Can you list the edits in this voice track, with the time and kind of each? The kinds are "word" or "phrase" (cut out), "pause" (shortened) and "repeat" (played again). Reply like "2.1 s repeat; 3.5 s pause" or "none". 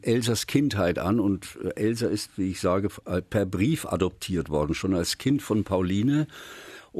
none